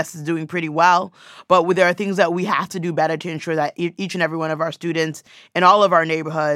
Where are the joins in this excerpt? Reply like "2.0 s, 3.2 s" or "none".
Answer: none